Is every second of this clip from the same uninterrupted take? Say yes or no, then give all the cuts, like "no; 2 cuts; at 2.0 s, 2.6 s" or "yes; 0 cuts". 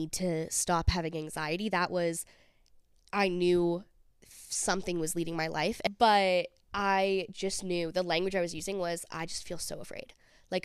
yes; 0 cuts